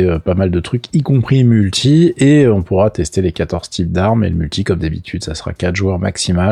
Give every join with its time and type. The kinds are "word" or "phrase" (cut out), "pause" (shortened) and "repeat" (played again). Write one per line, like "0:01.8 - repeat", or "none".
none